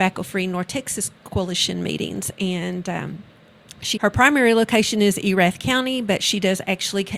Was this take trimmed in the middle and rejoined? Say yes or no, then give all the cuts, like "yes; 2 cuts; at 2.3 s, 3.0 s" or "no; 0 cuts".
yes; 1 cut; at 4.0 s